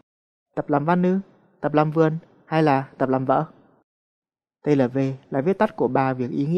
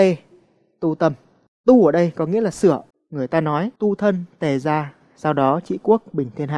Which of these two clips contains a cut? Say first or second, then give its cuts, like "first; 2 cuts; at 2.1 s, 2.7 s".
second; 3 cuts; at 1.5 s, 2.9 s, 3.8 s